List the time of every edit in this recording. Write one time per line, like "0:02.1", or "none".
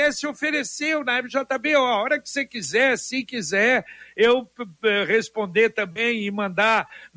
none